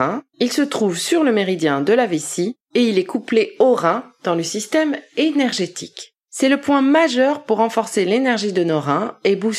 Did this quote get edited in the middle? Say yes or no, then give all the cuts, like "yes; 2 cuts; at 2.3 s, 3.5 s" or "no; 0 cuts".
no; 0 cuts